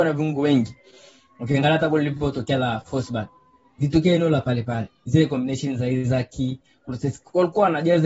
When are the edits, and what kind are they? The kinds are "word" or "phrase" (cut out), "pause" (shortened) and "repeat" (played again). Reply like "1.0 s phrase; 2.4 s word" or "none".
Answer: none